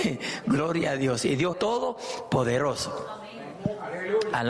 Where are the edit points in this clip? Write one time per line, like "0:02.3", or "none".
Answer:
0:01.5